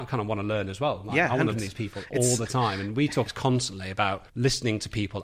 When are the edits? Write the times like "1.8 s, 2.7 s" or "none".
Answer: 1.5 s, 3.3 s, 4.3 s

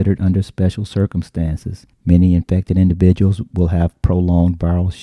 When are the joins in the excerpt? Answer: 1.9 s

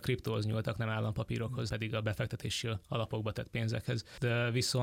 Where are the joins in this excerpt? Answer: 1.7 s

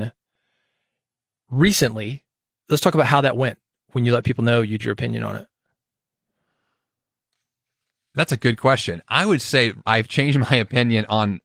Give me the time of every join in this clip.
4.8 s, 9.8 s

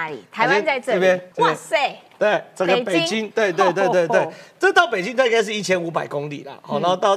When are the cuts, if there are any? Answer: 1.3 s

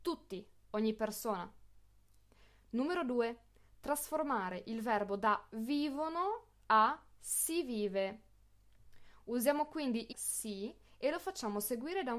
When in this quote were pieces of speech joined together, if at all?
10.1 s

